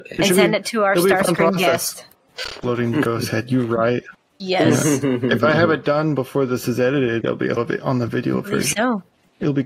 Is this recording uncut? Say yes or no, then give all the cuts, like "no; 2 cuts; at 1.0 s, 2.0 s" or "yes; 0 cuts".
no; 2 cuts; at 7.2 s, 7.6 s